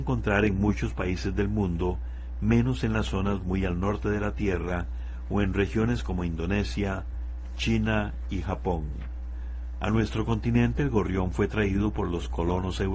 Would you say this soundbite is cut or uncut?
uncut